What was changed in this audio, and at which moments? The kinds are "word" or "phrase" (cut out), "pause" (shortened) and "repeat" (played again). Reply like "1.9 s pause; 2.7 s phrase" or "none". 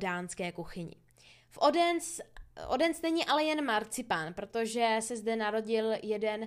none